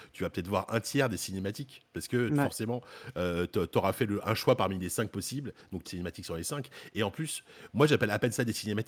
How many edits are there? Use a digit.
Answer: 1